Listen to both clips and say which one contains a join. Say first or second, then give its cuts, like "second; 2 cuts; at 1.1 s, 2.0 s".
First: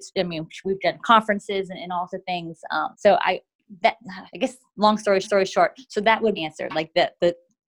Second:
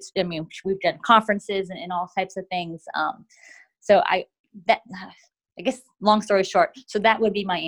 first; 5 cuts; at 2.1 s, 2.9 s, 4.3 s, 5.2 s, 6.4 s